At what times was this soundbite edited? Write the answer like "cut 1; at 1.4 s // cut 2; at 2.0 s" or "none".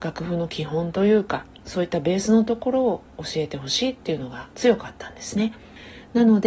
cut 1; at 4.5 s